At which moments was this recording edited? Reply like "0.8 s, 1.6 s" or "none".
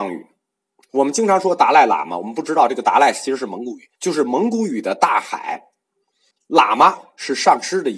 4.0 s, 6.3 s